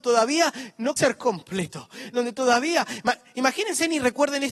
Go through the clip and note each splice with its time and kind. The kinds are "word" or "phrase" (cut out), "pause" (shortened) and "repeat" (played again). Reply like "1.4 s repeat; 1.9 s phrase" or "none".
1.0 s word